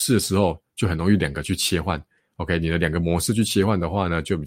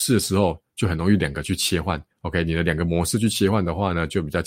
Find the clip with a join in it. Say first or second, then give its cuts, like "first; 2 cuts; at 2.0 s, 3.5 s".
second; 1 cut; at 2.1 s